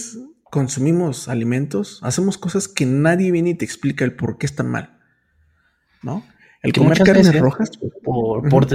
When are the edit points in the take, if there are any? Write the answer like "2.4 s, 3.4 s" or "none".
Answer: none